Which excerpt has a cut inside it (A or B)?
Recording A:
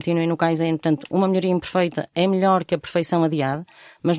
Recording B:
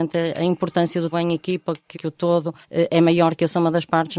B